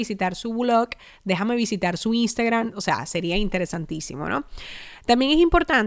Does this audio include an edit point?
no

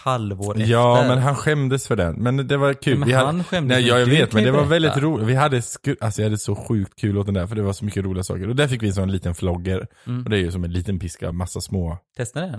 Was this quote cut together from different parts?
yes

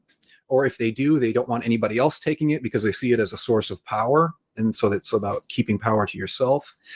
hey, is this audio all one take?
yes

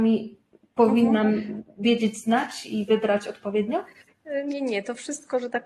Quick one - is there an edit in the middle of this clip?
no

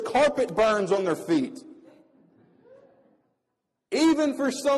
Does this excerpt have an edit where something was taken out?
no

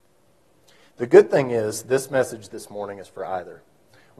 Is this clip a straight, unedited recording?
yes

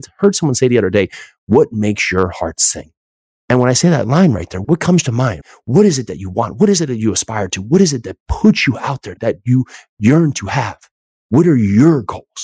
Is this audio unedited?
yes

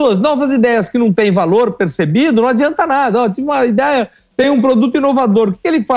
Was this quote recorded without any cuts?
yes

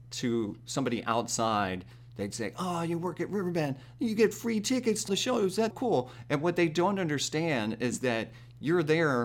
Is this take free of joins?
no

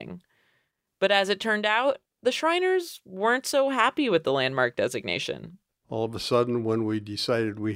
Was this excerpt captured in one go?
yes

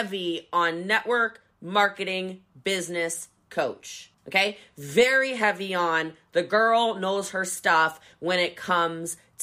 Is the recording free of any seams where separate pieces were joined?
no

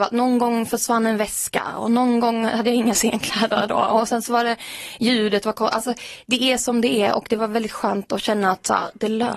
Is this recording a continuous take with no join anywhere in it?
yes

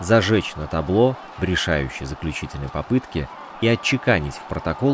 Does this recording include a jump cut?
no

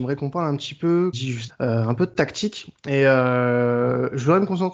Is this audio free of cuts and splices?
no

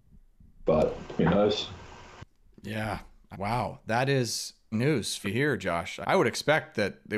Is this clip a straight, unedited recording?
no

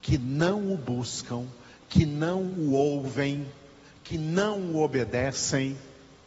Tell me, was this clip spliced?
no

